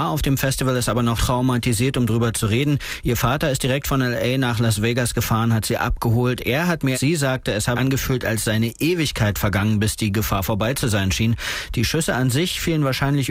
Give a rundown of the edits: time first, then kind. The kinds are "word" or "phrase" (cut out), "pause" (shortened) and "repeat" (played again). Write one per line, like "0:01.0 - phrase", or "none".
0:01.2 - word
0:06.9 - phrase
0:07.7 - word